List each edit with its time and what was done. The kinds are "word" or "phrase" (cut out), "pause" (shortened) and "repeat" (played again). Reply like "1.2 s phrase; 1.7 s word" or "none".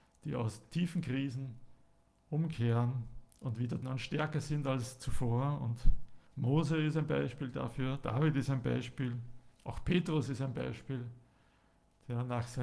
3.3 s pause; 3.8 s word; 6.3 s pause; 9.5 s pause

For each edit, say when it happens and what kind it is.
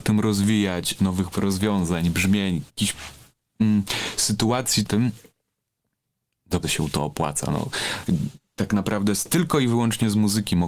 1.0 s word; 1.3 s word; 2.7 s pause; 4.8 s phrase; 6.6 s word

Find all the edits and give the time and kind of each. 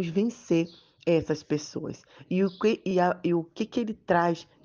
none

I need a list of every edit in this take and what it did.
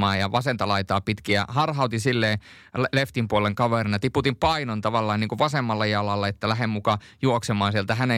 none

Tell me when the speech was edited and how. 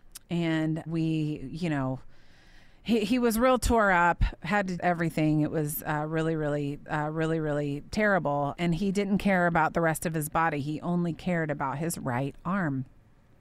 4.8 s phrase; 6.9 s repeat

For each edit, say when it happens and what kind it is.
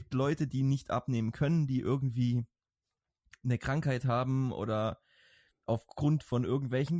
none

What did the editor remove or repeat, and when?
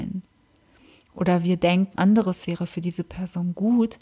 1.9 s word

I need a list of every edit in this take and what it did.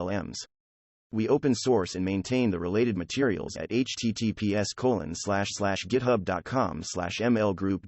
3.5 s phrase

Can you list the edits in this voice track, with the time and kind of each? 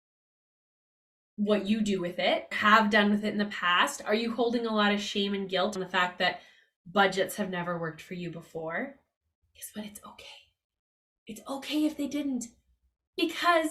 2.5 s word; 5.8 s word

